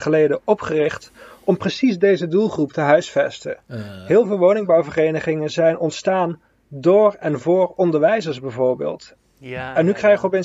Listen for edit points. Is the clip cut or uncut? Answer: uncut